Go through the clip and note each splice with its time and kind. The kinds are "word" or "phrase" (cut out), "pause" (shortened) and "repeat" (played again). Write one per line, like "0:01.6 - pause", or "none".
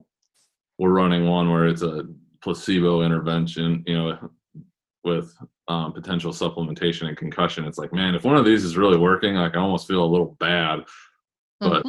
none

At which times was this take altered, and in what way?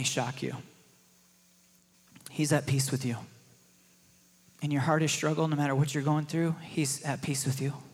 none

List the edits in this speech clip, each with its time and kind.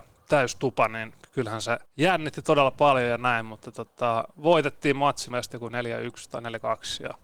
0:01.9 - pause
0:05.3 - word

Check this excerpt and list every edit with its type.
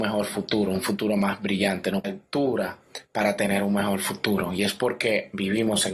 0:02.0 - phrase

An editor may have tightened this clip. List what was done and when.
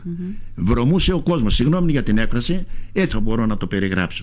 0:03.1 - word

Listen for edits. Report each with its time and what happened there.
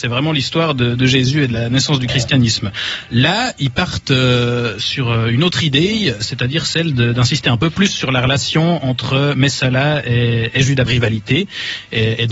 0:10.9 - phrase

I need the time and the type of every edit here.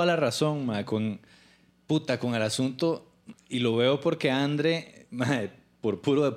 0:03.3 - pause

